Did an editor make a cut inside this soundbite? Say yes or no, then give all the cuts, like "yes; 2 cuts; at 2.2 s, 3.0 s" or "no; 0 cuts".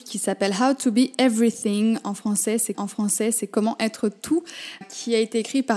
yes; 2 cuts; at 2.7 s, 4.8 s